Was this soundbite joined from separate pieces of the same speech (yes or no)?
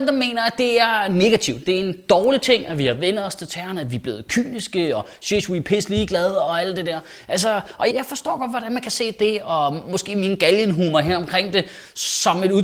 yes